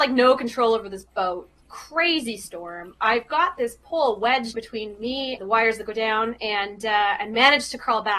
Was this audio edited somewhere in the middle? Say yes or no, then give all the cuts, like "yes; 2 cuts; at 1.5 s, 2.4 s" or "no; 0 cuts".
yes; 2 cuts; at 4.5 s, 5.4 s